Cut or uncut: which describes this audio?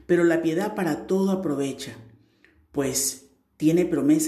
uncut